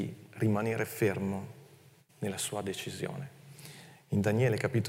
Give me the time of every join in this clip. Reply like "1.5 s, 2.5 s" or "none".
2.1 s